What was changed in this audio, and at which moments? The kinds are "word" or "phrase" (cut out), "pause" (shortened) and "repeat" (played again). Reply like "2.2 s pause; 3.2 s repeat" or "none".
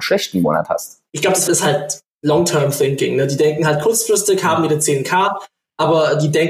1.1 s pause; 1.5 s phrase